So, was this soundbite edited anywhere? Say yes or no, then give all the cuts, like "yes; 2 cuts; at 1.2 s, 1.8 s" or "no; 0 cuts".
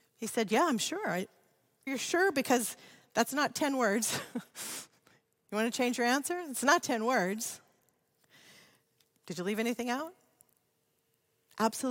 yes; 1 cut; at 1.9 s